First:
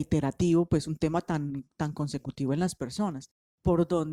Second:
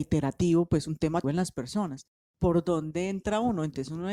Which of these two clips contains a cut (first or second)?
second